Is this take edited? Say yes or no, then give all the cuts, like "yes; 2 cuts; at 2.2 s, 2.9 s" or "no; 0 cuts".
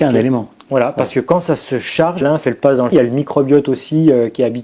yes; 2 cuts; at 2.2 s, 2.9 s